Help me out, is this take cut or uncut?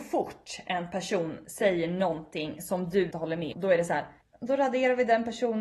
cut